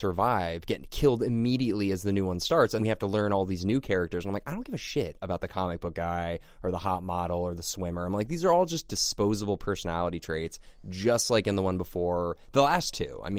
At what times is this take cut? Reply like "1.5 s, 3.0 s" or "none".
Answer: 2.8 s